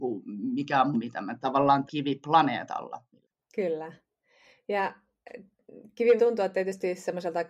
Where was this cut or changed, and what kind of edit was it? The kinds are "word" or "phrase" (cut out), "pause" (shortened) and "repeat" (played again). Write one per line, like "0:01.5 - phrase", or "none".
0:00.9 - word
0:01.4 - word
0:01.9 - word
0:06.2 - word